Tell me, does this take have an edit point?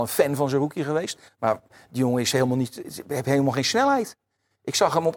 no; 0 cuts

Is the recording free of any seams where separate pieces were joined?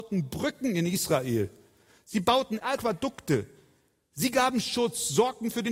yes; 0 cuts

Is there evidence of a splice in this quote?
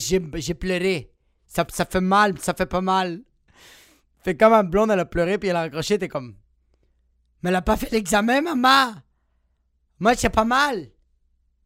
yes; 1 cut; at 1.7 s

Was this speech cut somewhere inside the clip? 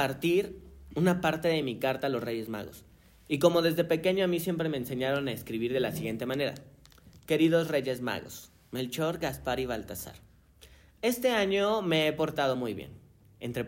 no; 0 cuts

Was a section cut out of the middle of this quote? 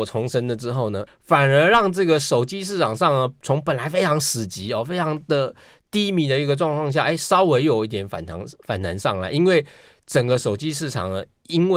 yes; 1 cut; at 1.1 s

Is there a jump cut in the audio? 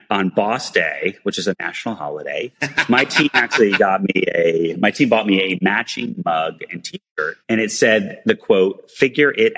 yes; 1 cut; at 7.4 s

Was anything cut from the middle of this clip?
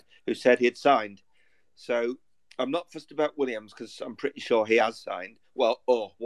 no; 0 cuts

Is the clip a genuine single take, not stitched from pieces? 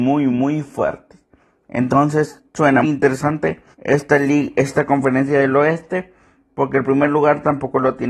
no; 2 cuts; at 2.8 s, 3.7 s

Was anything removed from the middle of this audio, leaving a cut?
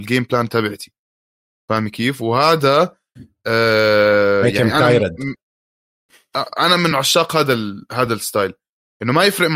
no; 0 cuts

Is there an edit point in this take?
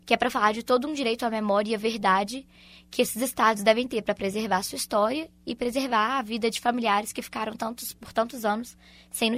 no; 0 cuts

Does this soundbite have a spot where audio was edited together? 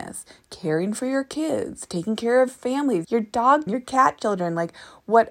yes; 3 cuts; at 2.5 s, 3.0 s, 3.7 s

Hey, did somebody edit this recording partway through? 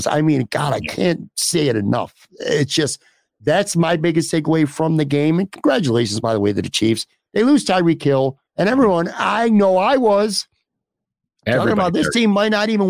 yes; 1 cut; at 8.5 s

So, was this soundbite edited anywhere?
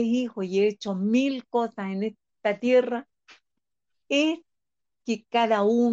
no; 0 cuts

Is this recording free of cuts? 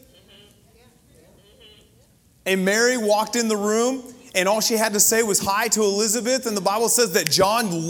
yes; 0 cuts

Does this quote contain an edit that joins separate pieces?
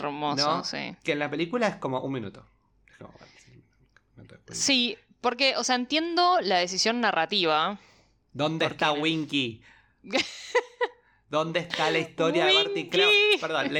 no; 0 cuts

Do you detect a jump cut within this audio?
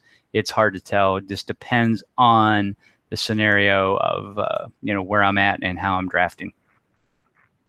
no; 0 cuts

